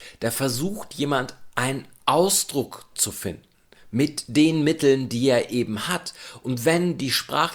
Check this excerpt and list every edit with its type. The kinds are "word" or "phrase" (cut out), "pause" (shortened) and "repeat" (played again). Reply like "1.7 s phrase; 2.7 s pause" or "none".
none